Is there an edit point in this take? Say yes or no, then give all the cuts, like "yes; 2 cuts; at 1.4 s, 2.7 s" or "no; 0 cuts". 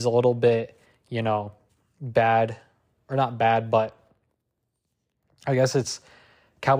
no; 0 cuts